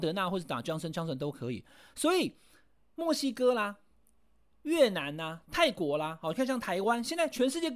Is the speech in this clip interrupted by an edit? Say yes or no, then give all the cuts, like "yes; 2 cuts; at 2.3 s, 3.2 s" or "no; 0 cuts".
no; 0 cuts